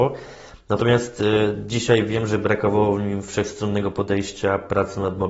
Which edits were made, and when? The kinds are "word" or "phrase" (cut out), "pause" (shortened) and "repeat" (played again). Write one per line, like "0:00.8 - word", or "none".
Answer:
none